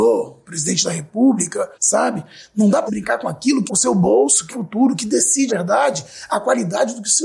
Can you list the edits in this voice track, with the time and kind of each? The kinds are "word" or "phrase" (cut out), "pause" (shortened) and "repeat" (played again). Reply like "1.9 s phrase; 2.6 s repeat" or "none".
1.7 s pause; 2.9 s word; 3.7 s word; 4.5 s phrase; 5.5 s word